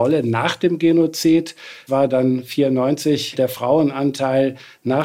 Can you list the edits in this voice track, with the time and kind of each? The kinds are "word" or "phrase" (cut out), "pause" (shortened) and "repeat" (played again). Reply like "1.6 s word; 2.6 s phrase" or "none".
1.9 s word; 3.3 s word